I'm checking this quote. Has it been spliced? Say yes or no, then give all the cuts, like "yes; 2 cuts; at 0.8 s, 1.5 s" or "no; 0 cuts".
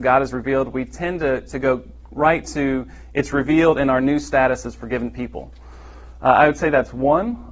no; 0 cuts